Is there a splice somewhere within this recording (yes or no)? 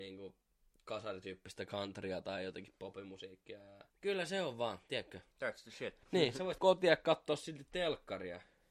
yes